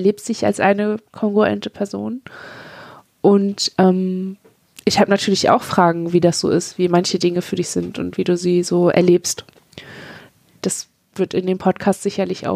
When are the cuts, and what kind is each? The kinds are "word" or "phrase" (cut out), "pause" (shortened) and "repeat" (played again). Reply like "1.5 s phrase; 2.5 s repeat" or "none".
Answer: none